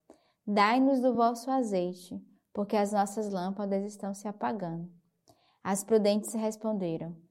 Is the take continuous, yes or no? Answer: yes